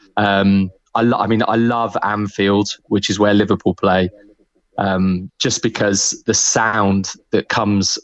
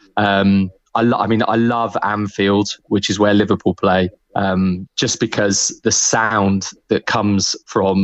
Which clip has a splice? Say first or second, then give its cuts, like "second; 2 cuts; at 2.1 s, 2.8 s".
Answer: second; 1 cut; at 4.1 s